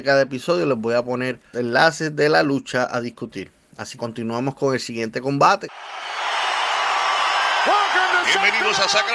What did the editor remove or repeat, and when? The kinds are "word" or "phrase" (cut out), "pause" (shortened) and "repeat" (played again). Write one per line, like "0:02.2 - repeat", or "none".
0:01.5 - word
0:04.0 - word